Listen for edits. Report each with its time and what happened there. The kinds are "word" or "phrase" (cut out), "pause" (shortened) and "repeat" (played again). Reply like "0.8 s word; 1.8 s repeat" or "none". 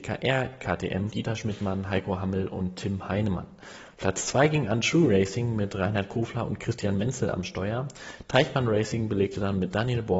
1.1 s word

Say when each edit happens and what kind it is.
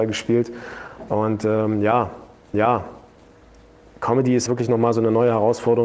2.5 s repeat; 4.5 s word

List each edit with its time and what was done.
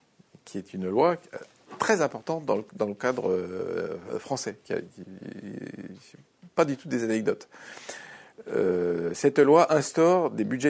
none

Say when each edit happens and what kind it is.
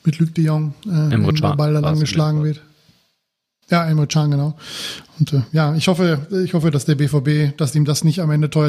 none

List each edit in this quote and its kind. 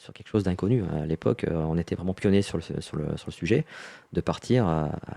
none

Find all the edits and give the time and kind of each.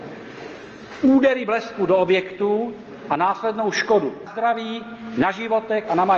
4.3 s word

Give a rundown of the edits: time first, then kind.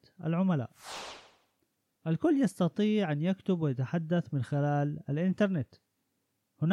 none

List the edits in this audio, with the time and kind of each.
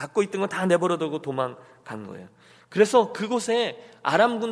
none

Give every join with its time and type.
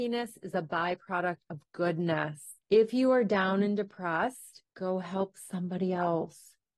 2.6 s pause; 4.7 s pause

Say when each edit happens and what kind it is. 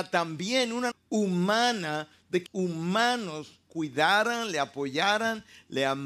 0.9 s word; 2.5 s word

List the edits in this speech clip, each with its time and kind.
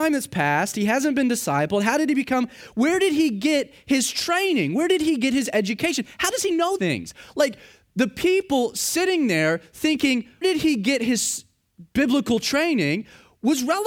6.8 s word; 10.4 s word

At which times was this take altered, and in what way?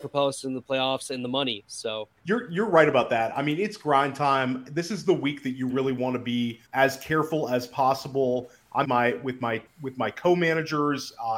2.2 s pause; 5.7 s word; 6.7 s pause; 8.8 s phrase; 9.7 s word

